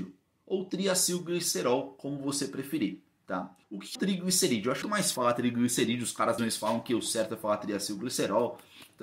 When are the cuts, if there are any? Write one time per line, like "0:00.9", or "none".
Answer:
0:03.6
0:04.0
0:04.8
0:05.2
0:06.4